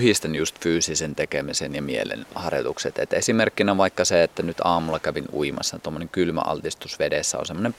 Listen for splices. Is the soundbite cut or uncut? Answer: cut